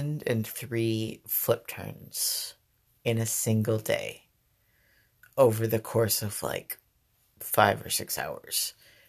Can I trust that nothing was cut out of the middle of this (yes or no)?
yes